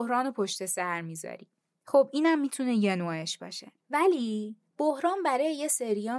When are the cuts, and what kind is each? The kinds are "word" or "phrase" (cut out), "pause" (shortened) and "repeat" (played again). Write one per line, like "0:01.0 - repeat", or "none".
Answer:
0:01.7 - pause